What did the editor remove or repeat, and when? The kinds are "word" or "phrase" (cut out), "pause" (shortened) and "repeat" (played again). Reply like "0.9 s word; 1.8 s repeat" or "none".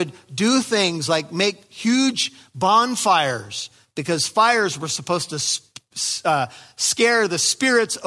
none